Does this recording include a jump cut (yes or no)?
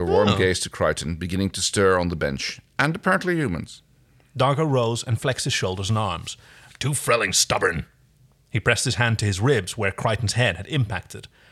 no